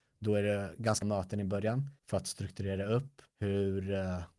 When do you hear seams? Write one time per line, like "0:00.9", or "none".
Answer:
0:01.0
0:02.0
0:03.3